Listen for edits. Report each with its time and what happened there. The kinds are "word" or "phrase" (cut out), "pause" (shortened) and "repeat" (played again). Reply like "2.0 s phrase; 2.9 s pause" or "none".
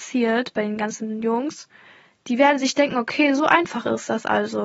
none